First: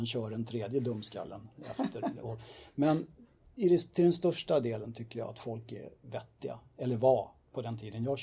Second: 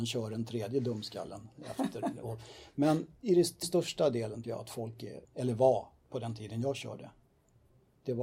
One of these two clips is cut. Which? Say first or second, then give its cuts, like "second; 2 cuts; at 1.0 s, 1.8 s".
second; 4 cuts; at 3.2 s, 3.6 s, 4.4 s, 5.2 s